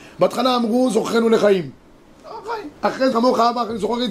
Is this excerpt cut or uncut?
cut